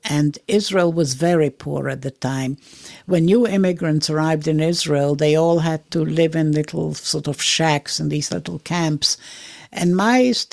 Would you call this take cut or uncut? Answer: uncut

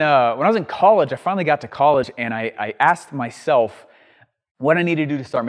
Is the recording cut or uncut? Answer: cut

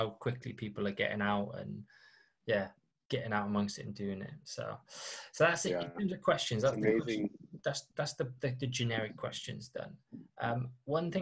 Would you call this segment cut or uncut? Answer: uncut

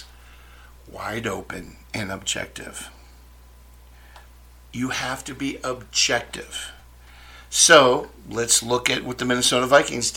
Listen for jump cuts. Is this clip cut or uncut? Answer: uncut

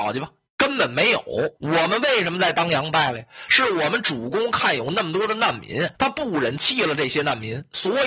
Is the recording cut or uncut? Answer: cut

